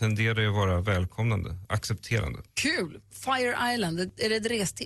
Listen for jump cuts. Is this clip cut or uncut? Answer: cut